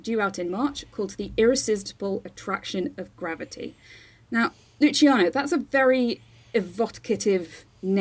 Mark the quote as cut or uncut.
uncut